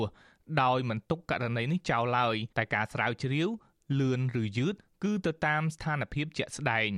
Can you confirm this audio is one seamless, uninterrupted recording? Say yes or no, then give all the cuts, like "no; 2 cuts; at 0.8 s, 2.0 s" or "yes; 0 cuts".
no; 1 cut; at 2.5 s